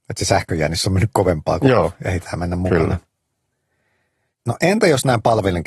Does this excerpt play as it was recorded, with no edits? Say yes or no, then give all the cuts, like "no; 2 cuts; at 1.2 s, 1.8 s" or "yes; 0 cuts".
yes; 0 cuts